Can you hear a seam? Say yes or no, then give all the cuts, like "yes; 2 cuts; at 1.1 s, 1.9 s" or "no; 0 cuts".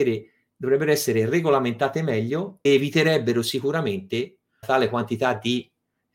yes; 2 cuts; at 2.7 s, 4.6 s